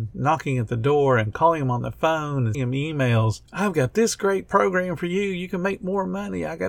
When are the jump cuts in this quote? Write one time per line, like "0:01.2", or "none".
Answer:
0:02.5